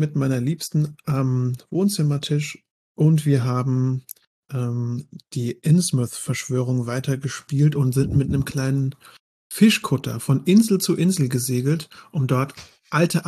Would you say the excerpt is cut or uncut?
uncut